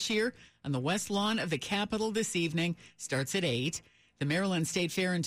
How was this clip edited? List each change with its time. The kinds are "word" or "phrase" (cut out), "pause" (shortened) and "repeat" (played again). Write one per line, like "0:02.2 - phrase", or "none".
none